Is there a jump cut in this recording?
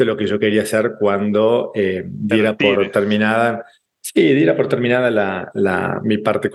no; 0 cuts

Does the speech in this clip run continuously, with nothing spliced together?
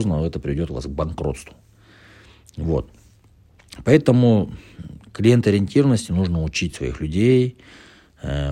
yes; 0 cuts

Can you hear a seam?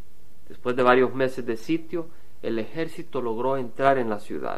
no; 0 cuts

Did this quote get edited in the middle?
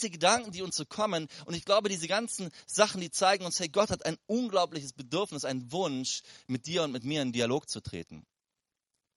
no; 0 cuts

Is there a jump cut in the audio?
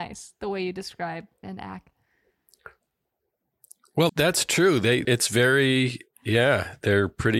yes; 3 cuts; at 1.4 s, 4.1 s, 5.0 s

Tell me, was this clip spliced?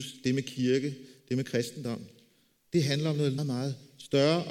yes; 1 cut; at 3.4 s

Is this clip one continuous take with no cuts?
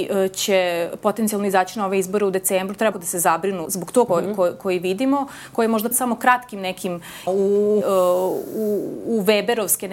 no; 6 cuts; at 2.9 s, 3.6 s, 4.1 s, 5.9 s, 7.3 s, 7.8 s

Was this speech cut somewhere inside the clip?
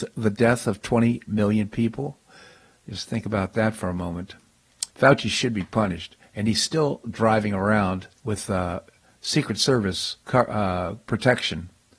yes; 3 cuts; at 4.9 s, 8.2 s, 10.2 s

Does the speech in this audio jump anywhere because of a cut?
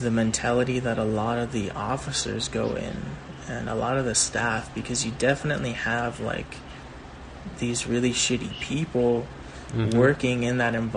no; 0 cuts

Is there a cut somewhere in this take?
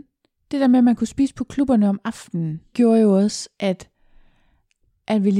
yes; 1 cut; at 2.7 s

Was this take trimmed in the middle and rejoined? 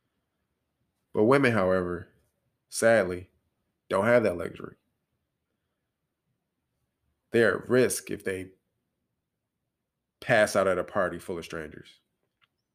no; 0 cuts

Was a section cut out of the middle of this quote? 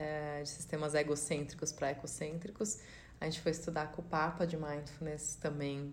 no; 0 cuts

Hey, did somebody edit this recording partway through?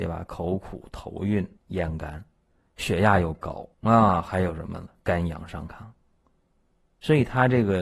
yes; 2 cuts; at 1.6 s, 3.7 s

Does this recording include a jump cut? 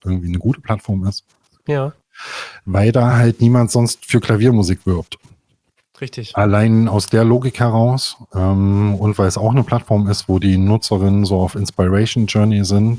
no; 0 cuts

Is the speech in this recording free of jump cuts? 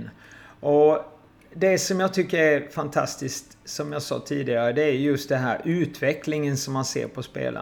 yes; 0 cuts

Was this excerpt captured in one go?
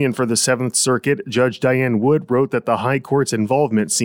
yes; 0 cuts

